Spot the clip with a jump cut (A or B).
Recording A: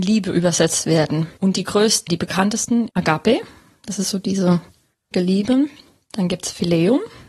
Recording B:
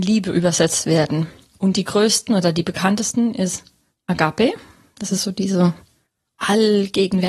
A